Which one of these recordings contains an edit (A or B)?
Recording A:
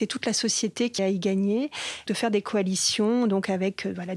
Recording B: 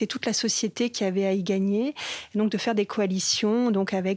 A